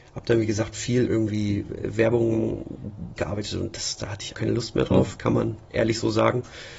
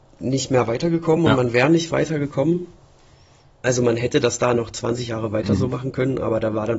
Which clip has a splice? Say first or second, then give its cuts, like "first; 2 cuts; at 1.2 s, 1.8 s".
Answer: first; 4 cuts; at 1.0 s, 3.2 s, 4.3 s, 5.7 s